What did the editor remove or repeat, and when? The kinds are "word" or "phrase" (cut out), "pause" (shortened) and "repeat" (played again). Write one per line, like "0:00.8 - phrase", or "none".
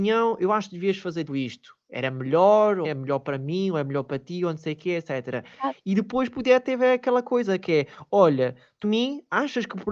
0:01.3 - word
0:02.8 - word
0:08.8 - phrase